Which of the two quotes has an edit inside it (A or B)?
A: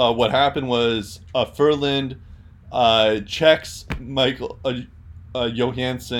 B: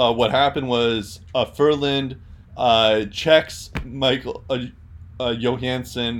B